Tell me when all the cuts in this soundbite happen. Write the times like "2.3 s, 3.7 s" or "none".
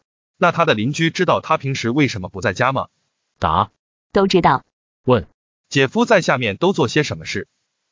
none